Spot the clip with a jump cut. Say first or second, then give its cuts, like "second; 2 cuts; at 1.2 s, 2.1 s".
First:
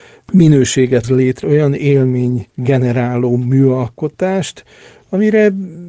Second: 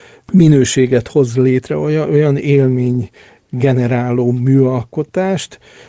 first; 3 cuts; at 1.0 s, 1.4 s, 2.5 s